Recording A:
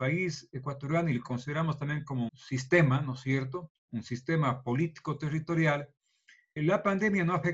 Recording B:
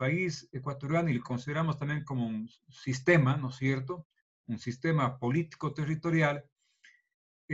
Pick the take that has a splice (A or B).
A